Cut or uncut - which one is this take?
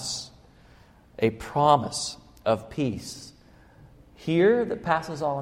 uncut